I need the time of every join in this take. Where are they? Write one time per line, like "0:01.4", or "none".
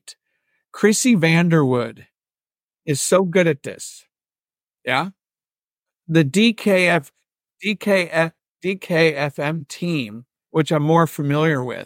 none